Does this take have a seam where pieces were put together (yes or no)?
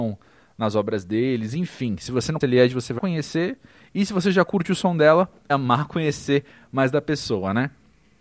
yes